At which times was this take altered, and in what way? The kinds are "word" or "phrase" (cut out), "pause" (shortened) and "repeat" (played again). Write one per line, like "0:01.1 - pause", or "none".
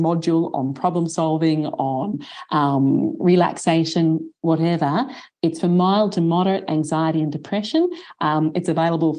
none